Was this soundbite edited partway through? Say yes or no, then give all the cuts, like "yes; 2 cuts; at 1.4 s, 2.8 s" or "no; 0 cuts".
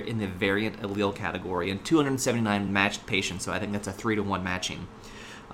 no; 0 cuts